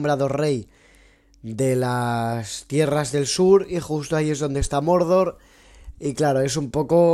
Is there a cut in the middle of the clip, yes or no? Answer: no